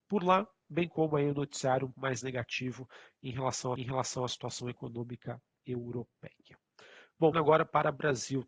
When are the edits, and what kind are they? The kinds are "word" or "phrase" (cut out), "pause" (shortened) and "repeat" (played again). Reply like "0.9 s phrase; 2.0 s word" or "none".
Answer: 1.9 s word; 3.8 s repeat; 7.3 s word